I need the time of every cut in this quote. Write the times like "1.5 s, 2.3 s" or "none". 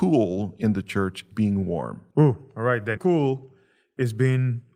1.3 s, 2.1 s, 3.0 s

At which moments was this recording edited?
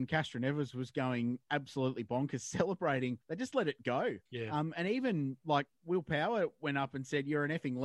3.2 s, 4.3 s, 5.7 s

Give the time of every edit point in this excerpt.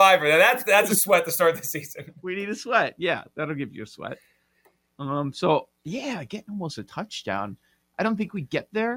none

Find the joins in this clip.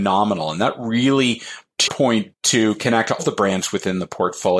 1.9 s, 2.3 s, 3.2 s

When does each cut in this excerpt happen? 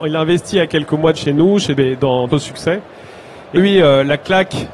1.2 s, 1.8 s, 2.3 s, 3.6 s

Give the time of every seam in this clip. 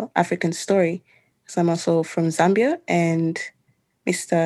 none

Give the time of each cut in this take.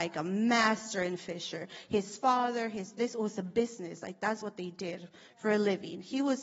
none

